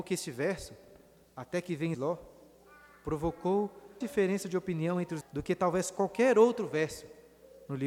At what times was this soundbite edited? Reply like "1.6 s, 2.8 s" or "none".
1.9 s, 4.0 s, 5.2 s

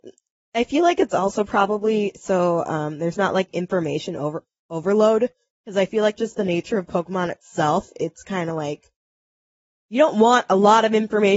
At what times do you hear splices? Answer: none

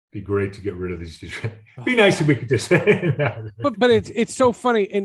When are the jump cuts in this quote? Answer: 3.7 s

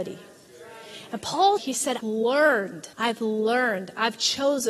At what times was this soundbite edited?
1.6 s, 2.0 s, 2.9 s

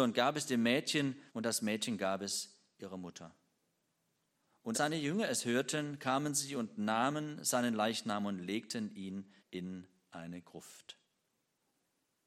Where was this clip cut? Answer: 1.3 s, 4.7 s, 9.4 s

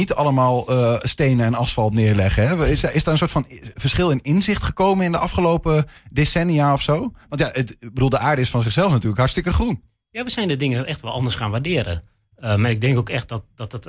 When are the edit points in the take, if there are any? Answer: none

